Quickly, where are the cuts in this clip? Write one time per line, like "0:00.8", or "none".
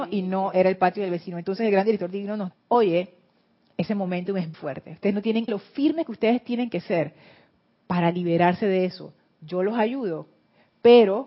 0:02.5
0:04.5
0:05.5